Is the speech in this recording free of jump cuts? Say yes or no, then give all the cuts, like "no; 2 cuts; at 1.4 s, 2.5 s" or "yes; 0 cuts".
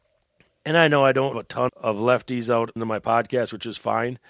no; 3 cuts; at 1.3 s, 1.7 s, 2.8 s